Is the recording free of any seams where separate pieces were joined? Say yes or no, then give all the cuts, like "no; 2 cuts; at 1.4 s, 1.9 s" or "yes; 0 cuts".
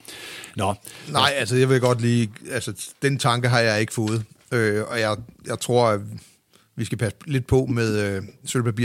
yes; 0 cuts